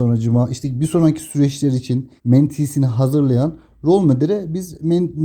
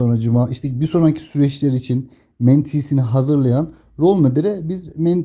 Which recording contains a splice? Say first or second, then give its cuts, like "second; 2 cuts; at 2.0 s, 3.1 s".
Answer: first; 1 cut; at 2.2 s